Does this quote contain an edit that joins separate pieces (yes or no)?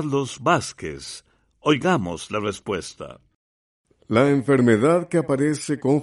no